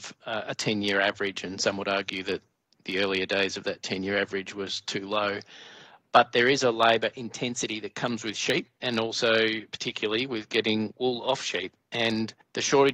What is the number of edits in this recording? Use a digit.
0